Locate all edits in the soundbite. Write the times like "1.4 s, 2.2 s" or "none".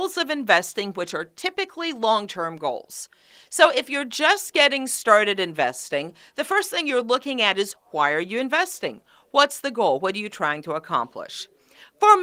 none